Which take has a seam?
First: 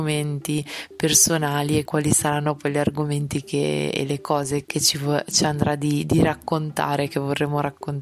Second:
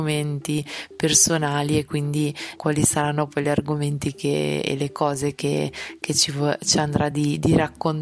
first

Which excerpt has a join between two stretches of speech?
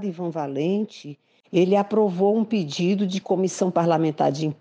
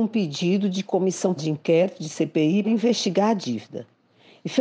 second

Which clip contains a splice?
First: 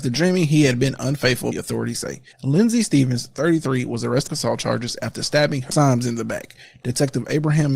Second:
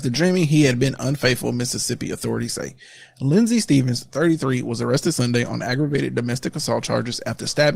first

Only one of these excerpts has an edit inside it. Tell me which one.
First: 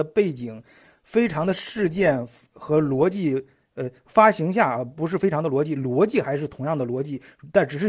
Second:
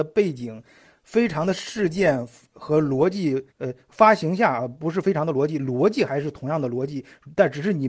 second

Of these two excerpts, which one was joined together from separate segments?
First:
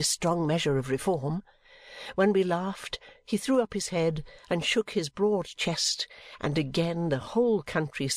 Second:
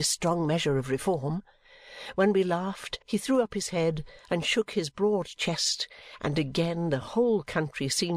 second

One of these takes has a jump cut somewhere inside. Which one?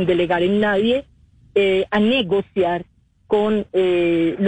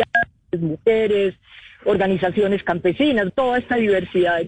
second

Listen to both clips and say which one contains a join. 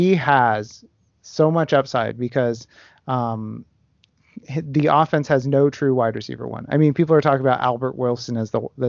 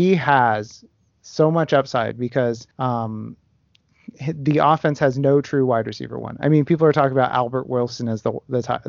second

